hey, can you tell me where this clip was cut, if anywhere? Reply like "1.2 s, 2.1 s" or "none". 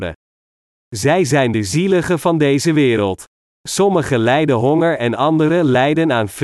none